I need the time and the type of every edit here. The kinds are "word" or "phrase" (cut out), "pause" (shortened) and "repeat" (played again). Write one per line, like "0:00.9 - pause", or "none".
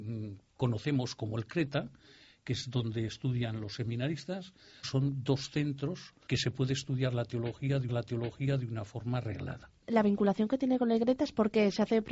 0:04.8 - word
0:06.3 - word
0:07.9 - repeat

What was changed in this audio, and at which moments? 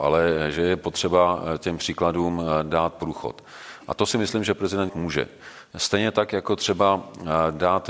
0:04.9 - word

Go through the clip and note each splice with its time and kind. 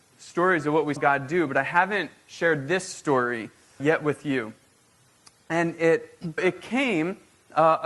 0:01.0 - word
0:03.8 - word
0:06.4 - word

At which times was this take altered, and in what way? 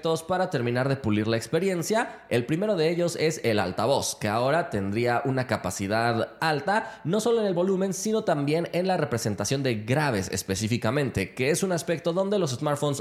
0:06.4 - word

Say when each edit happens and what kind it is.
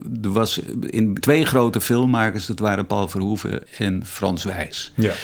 0:01.2 - phrase
0:03.7 - pause

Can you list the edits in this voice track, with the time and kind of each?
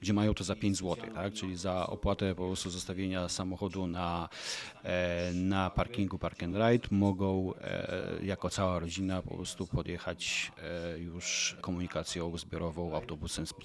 none

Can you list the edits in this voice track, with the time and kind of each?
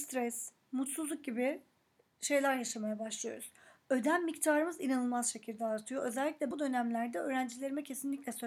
0:06.5 - word

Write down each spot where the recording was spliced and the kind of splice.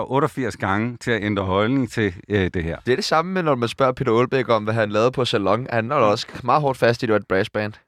none

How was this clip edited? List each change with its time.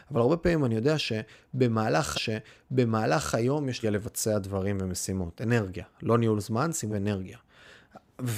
0:02.1 - repeat
0:03.8 - phrase
0:06.9 - word

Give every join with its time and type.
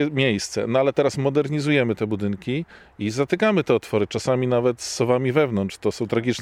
none

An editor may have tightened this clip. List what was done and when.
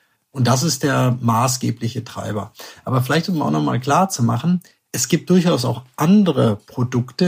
none

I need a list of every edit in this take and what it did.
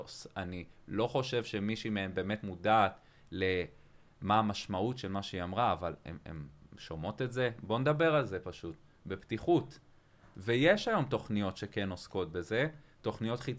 none

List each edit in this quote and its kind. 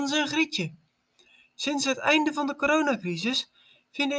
none

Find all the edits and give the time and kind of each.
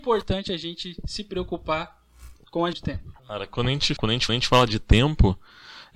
0:02.7 - word
0:03.2 - pause
0:04.0 - phrase
0:04.3 - repeat

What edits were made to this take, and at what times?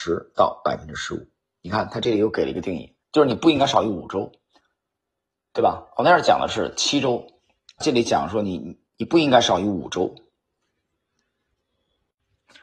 0:03.0 - pause
0:07.8 - word
0:08.9 - pause

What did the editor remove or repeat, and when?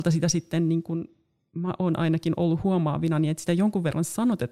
none

